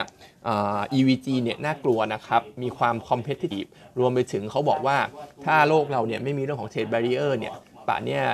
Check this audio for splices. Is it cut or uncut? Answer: cut